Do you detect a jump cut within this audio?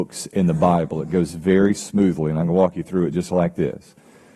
no; 0 cuts

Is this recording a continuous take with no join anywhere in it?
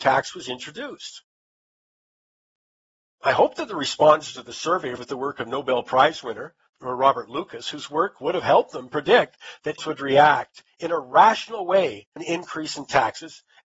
no; 4 cuts; at 5.0 s, 6.8 s, 9.8 s, 12.2 s

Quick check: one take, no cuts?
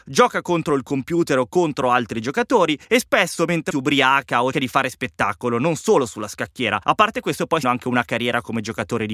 no; 5 cuts; at 2.8 s, 3.7 s, 4.5 s, 6.8 s, 7.6 s

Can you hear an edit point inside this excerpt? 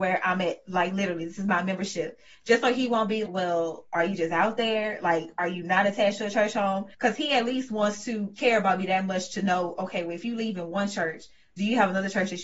yes; 2 cuts; at 3.3 s, 6.9 s

